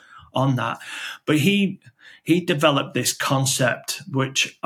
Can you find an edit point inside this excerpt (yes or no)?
no